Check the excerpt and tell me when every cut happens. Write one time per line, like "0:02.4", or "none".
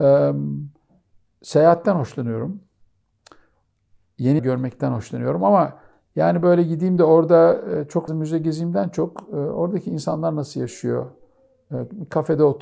0:04.4
0:08.1

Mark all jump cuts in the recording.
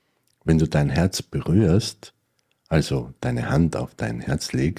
none

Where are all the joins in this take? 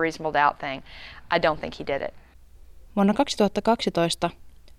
0:02.8

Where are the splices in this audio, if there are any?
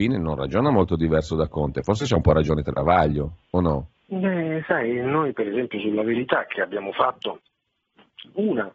0:04.0

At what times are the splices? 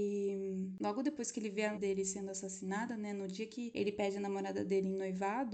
0:01.7

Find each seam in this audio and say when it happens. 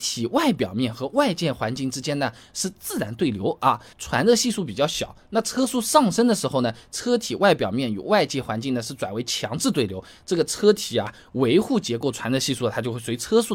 0:03.9

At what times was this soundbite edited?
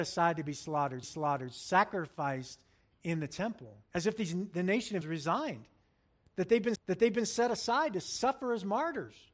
0:01.0
0:03.9
0:05.0
0:06.8

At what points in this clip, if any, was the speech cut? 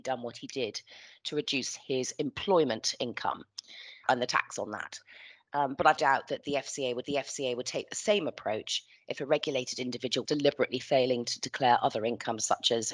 0:04.0
0:06.0
0:07.0
0:10.2

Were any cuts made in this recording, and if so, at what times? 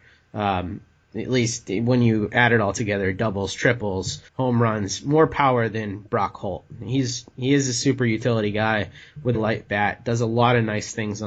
0:04.3
0:09.3

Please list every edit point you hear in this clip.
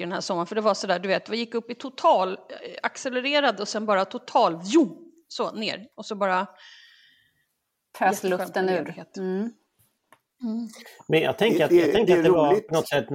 none

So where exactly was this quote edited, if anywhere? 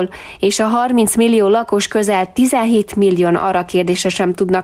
none

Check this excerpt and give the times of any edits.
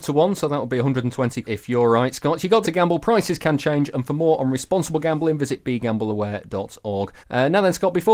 0:01.4
0:02.6
0:07.2

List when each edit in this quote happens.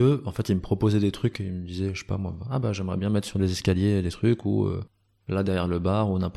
none

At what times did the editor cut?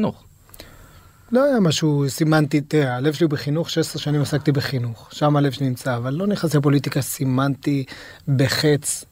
none

